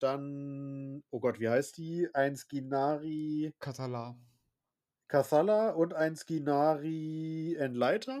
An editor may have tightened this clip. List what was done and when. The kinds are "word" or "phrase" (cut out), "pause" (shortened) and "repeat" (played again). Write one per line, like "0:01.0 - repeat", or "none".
none